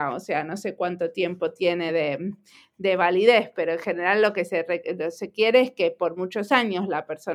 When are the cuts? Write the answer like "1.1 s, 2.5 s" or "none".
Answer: none

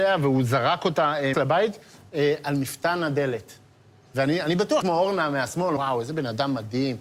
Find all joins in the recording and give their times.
1.3 s, 4.8 s, 5.8 s

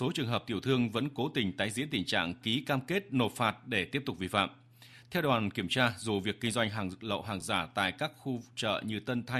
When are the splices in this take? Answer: none

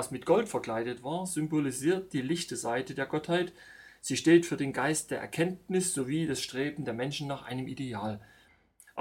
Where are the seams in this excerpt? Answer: none

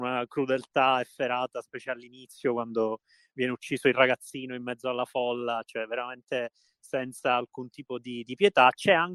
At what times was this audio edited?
none

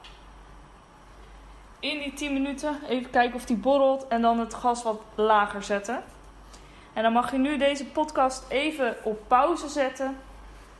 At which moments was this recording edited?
none

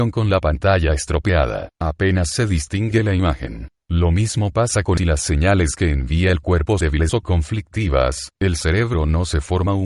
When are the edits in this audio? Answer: 1.7 s, 3.8 s, 5.0 s, 6.8 s

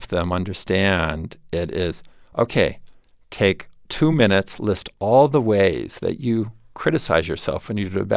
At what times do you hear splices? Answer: none

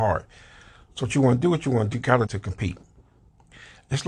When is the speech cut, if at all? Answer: 1.9 s, 2.3 s

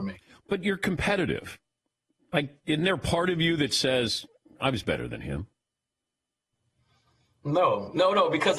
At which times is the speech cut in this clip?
none

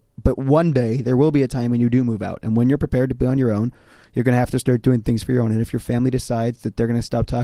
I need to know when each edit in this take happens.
none

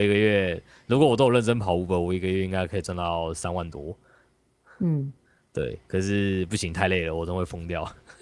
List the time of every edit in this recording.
none

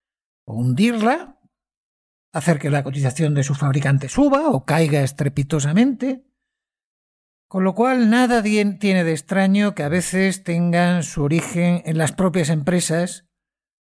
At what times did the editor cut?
none

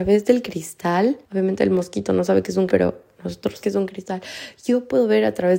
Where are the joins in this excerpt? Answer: 1.2 s, 2.7 s, 3.6 s

